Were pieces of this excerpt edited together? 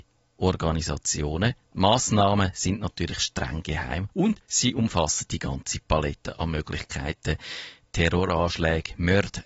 yes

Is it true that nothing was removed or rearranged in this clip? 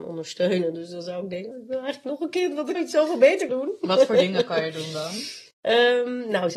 no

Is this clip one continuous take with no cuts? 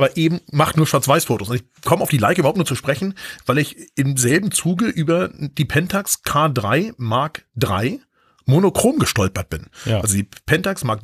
yes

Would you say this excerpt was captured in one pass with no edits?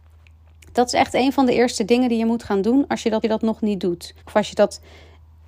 no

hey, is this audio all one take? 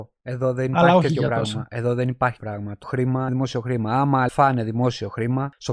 no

